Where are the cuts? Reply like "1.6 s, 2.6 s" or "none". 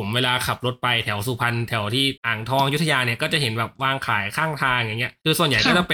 2.2 s